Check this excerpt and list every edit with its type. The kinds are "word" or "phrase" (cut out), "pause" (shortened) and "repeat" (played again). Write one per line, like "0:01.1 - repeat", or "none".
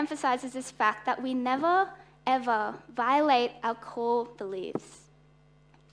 none

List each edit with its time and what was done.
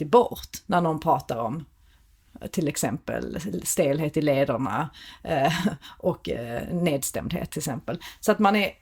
none

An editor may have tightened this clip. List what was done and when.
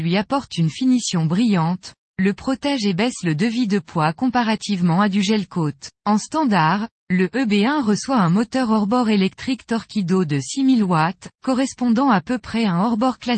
0:06.0 - pause
0:11.3 - pause

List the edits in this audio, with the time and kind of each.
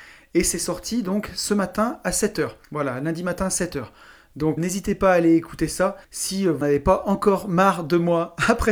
0:02.6 - pause
0:04.6 - word
0:06.0 - pause
0:06.6 - word

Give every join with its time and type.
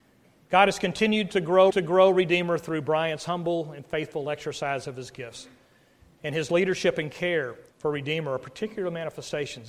0:01.7 - repeat
0:07.7 - pause

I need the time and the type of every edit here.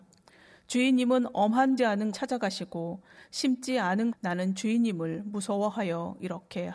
0:01.8 - phrase
0:02.1 - word
0:04.1 - phrase

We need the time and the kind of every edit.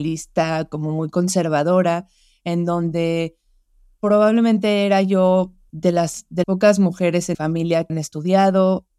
0:05.7 - word
0:06.4 - word
0:07.3 - word
0:07.9 - word

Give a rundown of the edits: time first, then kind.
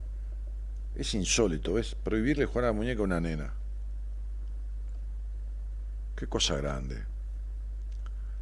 none

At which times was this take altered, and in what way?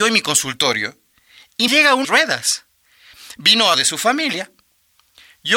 0:01.7 - word
0:02.0 - phrase
0:03.7 - word

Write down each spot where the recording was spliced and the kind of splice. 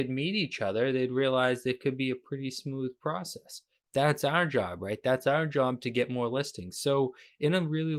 none

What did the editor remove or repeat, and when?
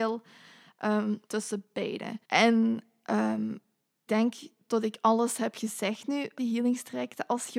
0:01.2 - pause
0:02.2 - pause
0:04.1 - word
0:06.4 - word

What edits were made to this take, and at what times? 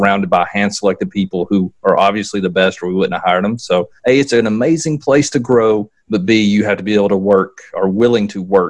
0:04.0 - pause
0:06.0 - pause

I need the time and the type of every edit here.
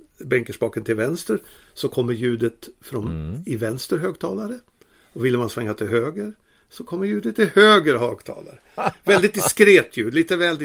none

